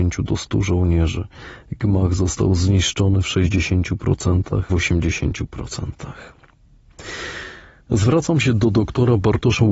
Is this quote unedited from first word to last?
no; 1 cut; at 4.7 s

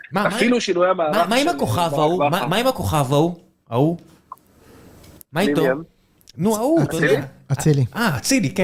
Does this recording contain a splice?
no; 0 cuts

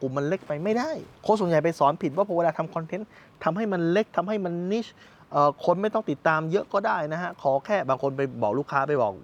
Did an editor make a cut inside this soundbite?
yes; 1 cut; at 1.1 s

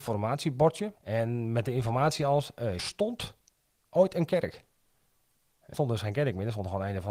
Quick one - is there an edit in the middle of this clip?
yes; 3 cuts; at 1.0 s, 2.8 s, 5.7 s

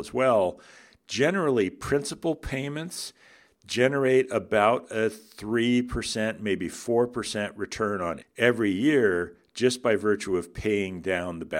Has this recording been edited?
yes; 1 cut; at 8.2 s

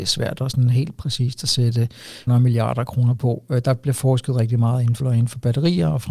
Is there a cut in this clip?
yes; 2 cuts; at 2.3 s, 5.0 s

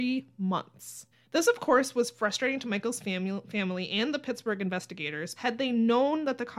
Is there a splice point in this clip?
yes; 2 cuts; at 1.1 s, 5.4 s

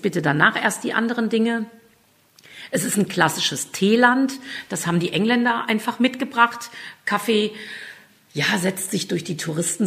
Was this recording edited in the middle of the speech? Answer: no; 0 cuts

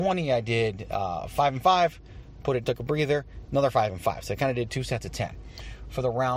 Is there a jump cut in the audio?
yes; 2 cuts; at 2.6 s, 4.7 s

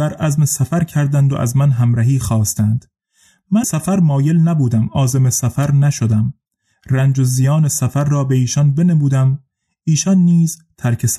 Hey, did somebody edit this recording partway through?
yes; 1 cut; at 3.6 s

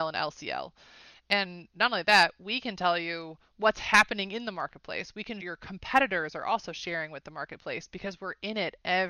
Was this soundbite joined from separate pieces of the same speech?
yes; 1 cut; at 5.4 s

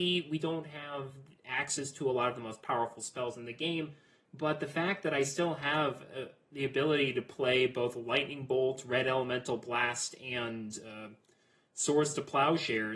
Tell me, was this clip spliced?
no; 0 cuts

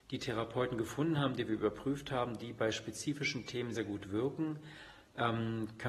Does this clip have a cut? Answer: yes; 1 cut; at 3.7 s

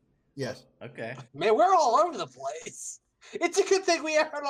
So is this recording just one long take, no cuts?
no; 1 cut; at 1.3 s

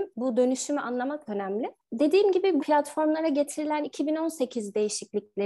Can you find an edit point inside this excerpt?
yes; 3 cuts; at 1.3 s, 2.6 s, 3.8 s

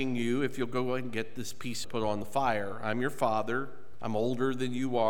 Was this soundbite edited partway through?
yes; 1 cut; at 1.8 s

